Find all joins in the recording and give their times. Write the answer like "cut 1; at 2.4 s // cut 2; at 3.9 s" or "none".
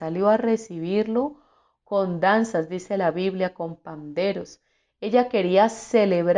none